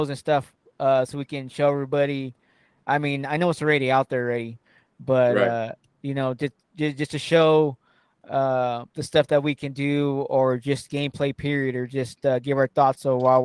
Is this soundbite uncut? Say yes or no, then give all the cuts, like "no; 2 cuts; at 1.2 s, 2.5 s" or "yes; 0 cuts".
yes; 0 cuts